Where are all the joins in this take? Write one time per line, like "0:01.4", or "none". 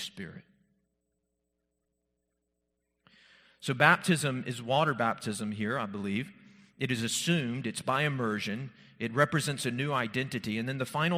none

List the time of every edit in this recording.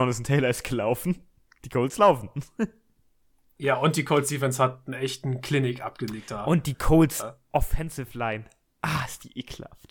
none

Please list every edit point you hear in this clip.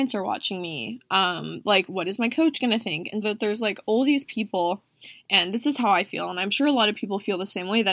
0:03.2

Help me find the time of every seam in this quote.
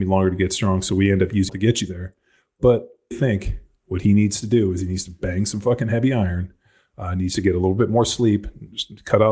0:01.5
0:03.1

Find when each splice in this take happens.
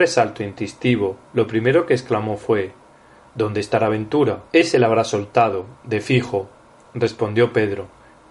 0:04.5

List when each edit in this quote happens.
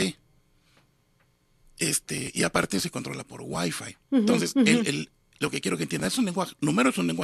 none

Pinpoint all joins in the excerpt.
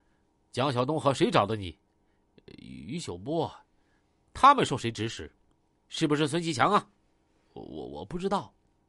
none

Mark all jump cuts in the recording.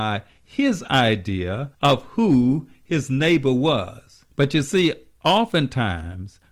0:01.7
0:04.3

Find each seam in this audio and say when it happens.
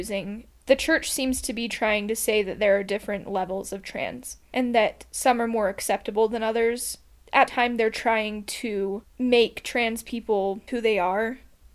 0:07.5
0:10.7

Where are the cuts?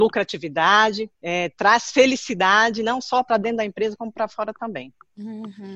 0:01.1

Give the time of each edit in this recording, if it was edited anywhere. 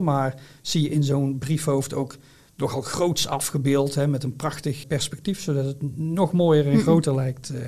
0:04.8

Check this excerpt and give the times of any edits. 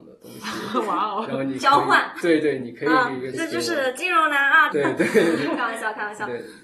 0:03.3
0:04.7

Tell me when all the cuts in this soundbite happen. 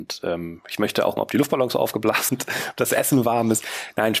0:01.2
0:02.3

